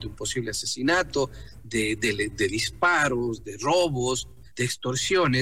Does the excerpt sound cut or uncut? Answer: cut